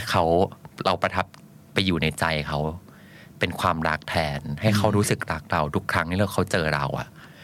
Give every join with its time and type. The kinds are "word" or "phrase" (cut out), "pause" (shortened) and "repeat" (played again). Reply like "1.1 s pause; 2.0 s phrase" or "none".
none